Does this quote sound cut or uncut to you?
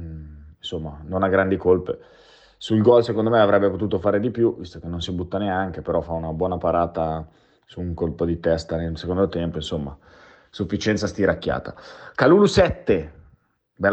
uncut